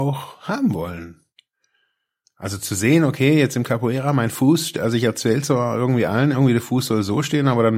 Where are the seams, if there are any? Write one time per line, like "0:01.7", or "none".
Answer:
none